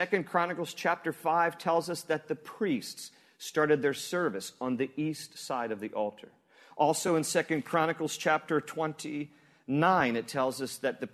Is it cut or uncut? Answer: uncut